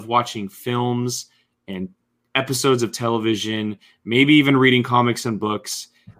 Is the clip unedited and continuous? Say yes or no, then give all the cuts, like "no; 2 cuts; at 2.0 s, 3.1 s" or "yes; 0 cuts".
yes; 0 cuts